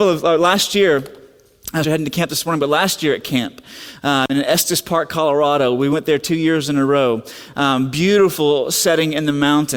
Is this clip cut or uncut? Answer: cut